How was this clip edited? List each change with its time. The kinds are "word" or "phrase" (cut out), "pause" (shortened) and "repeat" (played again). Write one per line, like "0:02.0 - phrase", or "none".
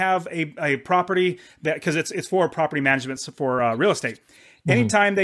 none